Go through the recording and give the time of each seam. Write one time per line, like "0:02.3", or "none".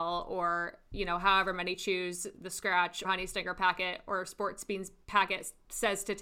0:03.0

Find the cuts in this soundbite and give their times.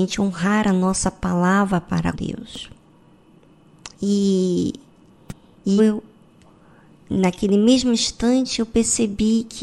0:02.1
0:03.9
0:05.8

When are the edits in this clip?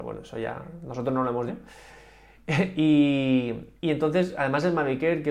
0:01.5
0:03.8

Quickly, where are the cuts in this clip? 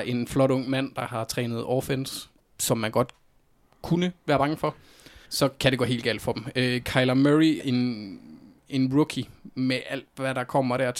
0:02.4
0:05.2
0:07.6

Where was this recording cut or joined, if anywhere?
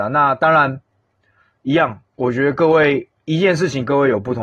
0:03.2

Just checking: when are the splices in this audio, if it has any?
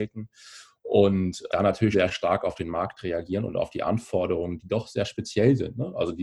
0:01.5
0:01.9

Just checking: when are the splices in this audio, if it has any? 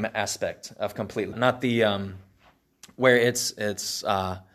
0:01.3

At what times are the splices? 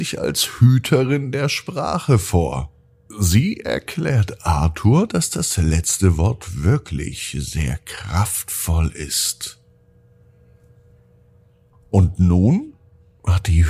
none

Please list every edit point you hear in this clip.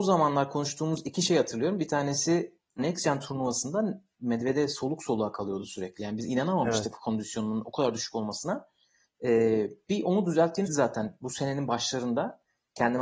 0:02.8
0:10.7

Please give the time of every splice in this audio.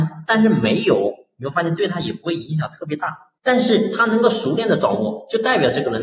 0:03.4

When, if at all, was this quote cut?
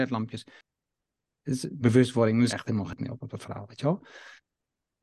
0:01.8
0:02.5

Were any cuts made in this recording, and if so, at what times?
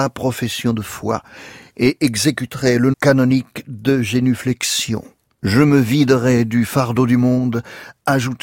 0:02.9
0:05.3

